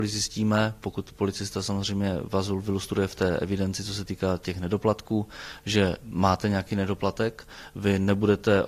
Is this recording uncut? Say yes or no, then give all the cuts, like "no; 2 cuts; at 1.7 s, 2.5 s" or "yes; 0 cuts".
yes; 0 cuts